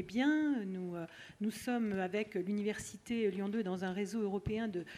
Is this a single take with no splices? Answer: yes; 0 cuts

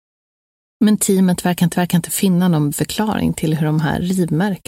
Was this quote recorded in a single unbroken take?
no; 2 cuts; at 1.7 s, 2.7 s

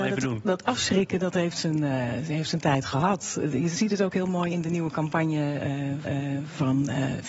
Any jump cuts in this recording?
yes; 1 cut; at 6.0 s

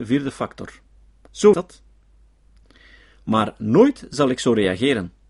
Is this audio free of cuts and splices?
no; 1 cut; at 1.5 s

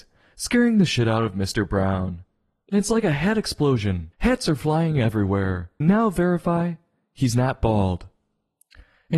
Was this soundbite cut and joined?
yes; 2 cuts; at 4.1 s, 5.8 s

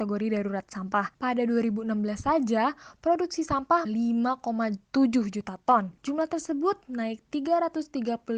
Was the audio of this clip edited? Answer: yes; 3 cuts; at 1.1 s, 3.9 s, 6.0 s

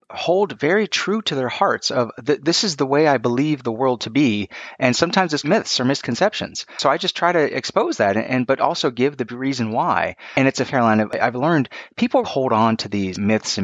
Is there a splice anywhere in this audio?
yes; 3 cuts; at 5.4 s, 10.7 s, 12.2 s

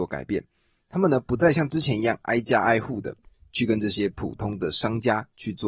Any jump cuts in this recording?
no; 0 cuts

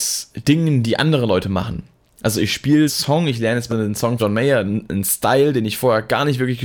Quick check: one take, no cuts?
no; 3 cuts; at 2.9 s, 3.7 s, 4.2 s

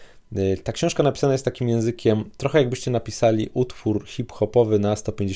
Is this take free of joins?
yes; 0 cuts

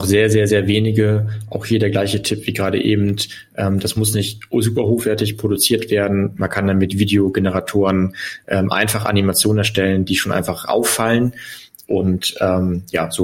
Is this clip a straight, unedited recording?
yes; 0 cuts

